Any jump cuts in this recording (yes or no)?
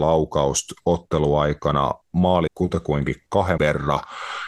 yes